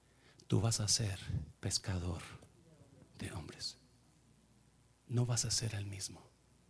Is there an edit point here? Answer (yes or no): yes